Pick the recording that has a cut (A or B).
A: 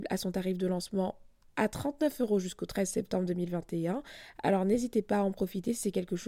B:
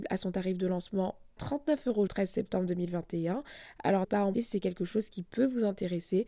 B